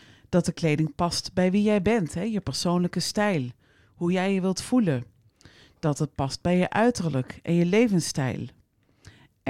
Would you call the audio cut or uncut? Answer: uncut